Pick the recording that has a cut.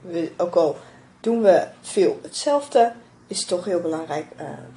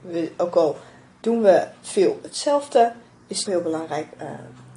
second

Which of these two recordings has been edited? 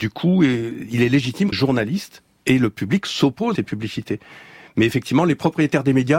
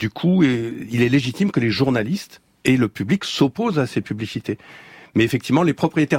first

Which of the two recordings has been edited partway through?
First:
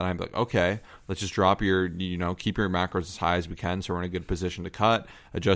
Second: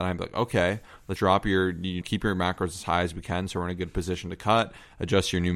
second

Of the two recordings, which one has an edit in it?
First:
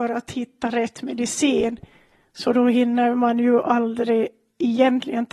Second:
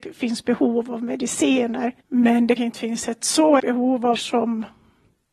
second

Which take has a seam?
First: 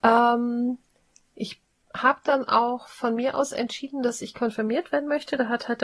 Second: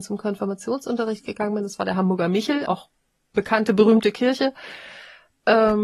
second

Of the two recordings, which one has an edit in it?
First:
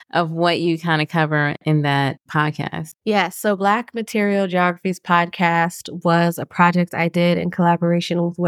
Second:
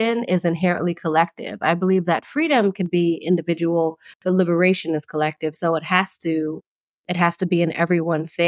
first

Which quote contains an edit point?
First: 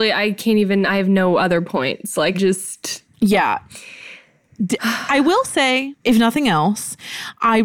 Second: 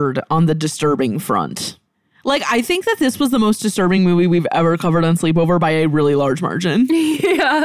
first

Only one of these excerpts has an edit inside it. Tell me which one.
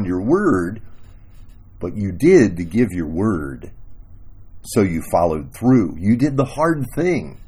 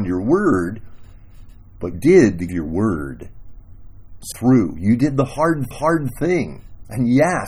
second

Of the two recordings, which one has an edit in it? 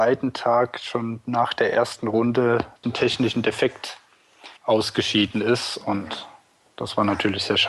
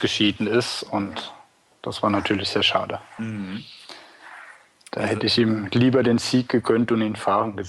first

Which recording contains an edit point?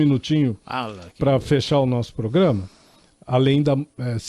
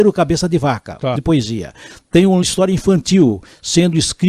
second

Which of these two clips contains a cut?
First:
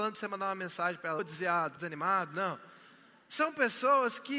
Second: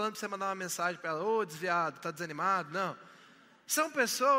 first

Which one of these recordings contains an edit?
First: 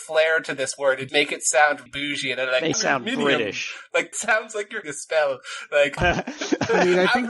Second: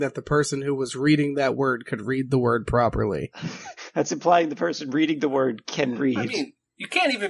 first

